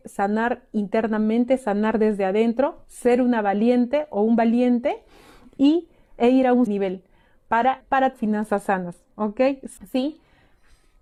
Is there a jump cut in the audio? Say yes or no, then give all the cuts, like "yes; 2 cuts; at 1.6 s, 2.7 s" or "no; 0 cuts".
yes; 3 cuts; at 6.7 s, 7.8 s, 8.1 s